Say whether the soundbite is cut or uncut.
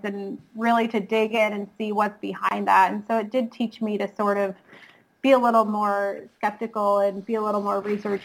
uncut